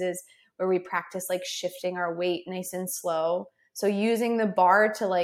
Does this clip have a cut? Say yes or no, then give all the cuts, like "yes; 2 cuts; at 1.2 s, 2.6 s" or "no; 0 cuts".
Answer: no; 0 cuts